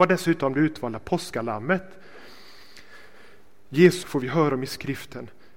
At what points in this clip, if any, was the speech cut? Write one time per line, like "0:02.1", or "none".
0:04.0